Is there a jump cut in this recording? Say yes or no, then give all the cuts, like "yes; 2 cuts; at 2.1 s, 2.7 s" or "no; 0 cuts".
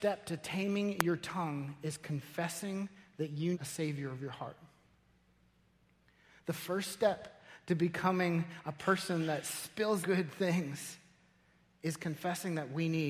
yes; 2 cuts; at 3.5 s, 10.0 s